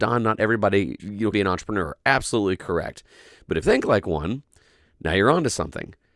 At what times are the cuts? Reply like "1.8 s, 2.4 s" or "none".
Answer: 1.0 s, 1.3 s, 3.6 s